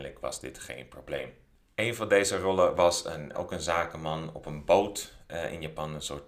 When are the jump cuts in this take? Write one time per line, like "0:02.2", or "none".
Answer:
0:03.3